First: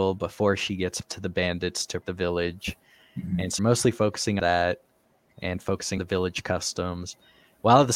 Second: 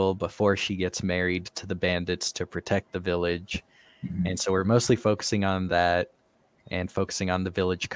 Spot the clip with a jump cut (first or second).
first